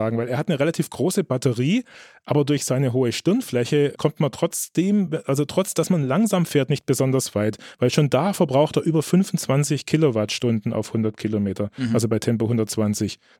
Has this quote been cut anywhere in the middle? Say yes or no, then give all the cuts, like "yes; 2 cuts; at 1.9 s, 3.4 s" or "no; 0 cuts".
no; 0 cuts